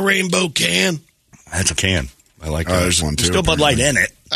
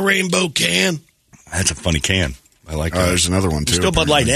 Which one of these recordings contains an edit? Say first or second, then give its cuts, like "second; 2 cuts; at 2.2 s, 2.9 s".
first; 2 cuts; at 1.8 s, 3.0 s